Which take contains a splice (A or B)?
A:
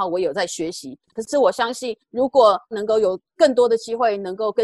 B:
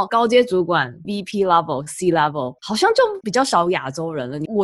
A